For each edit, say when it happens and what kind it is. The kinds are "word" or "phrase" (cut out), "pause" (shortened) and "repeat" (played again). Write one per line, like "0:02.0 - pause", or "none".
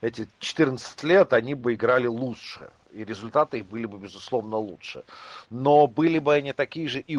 none